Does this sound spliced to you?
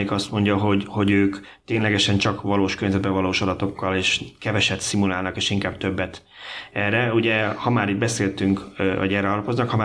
no; 0 cuts

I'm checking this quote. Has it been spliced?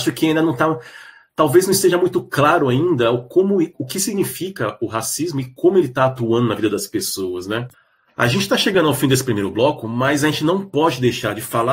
no; 0 cuts

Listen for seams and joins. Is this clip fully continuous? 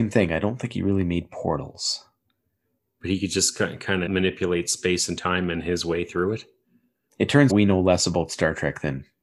no; 2 cuts; at 4.1 s, 7.5 s

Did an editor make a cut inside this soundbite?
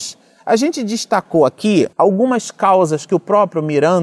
yes; 1 cut; at 1.9 s

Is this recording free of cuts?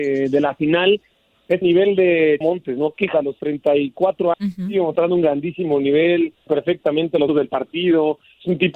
no; 6 cuts; at 1.6 s, 2.4 s, 3.1 s, 4.3 s, 6.5 s, 7.3 s

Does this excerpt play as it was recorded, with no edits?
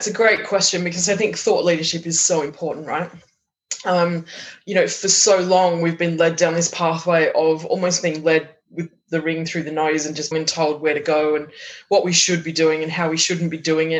no; 1 cut; at 10.3 s

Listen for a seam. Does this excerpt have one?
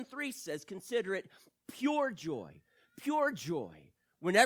no; 0 cuts

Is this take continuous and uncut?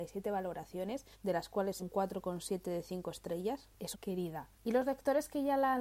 no; 4 cuts; at 1.1 s, 1.8 s, 3.9 s, 4.5 s

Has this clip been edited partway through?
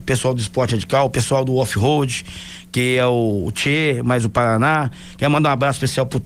no; 0 cuts

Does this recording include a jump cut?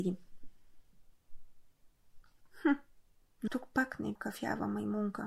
yes; 2 cuts; at 3.5 s, 4.2 s

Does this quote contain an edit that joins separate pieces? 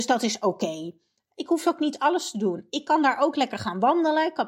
no; 0 cuts

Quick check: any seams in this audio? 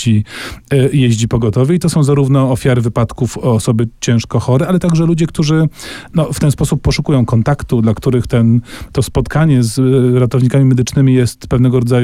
no; 0 cuts

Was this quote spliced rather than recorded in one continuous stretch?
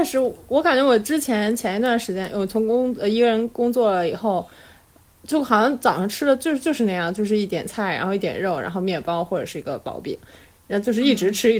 no; 0 cuts

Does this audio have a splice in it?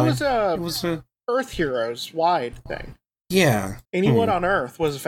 yes; 1 cut; at 3.8 s

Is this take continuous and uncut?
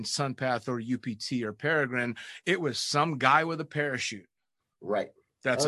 yes; 0 cuts

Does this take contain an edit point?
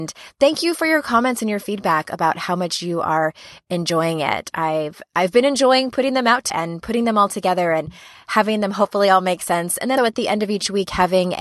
yes; 2 cuts; at 6.5 s, 10.0 s

